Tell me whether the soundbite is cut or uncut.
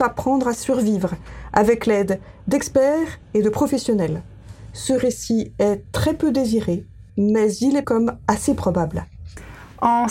cut